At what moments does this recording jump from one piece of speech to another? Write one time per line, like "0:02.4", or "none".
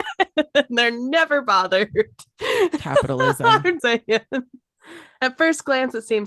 0:03.8